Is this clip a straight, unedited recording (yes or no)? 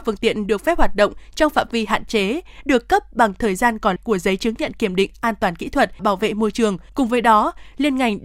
no